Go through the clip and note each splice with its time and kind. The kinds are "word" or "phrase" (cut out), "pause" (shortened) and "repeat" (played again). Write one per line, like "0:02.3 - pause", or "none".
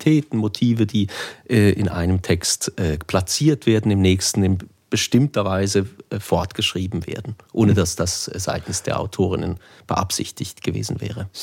none